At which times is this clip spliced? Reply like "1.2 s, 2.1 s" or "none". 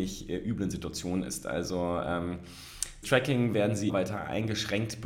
3.0 s, 3.9 s